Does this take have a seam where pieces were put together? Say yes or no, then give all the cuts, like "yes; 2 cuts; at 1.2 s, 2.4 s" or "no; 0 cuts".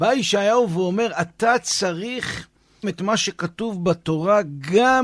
yes; 1 cut; at 2.8 s